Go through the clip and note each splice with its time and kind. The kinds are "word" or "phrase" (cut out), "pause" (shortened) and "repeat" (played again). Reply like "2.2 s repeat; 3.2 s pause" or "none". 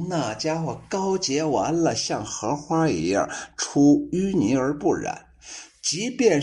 none